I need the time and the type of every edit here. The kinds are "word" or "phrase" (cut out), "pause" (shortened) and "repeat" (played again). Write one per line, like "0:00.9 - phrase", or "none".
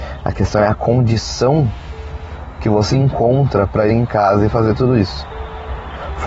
0:02.9 - word
0:03.9 - word